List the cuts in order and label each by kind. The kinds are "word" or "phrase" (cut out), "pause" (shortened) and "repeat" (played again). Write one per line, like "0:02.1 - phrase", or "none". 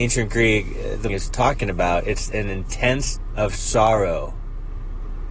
0:01.1 - word
0:02.3 - word
0:03.3 - word